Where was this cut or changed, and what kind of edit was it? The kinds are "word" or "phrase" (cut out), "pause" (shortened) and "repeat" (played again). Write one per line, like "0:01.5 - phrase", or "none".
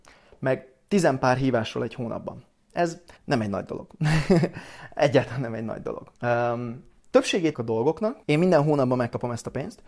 0:03.2 - pause
0:06.2 - pause
0:07.5 - word
0:08.2 - pause